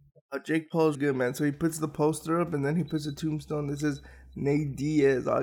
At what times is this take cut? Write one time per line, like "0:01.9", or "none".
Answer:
0:00.9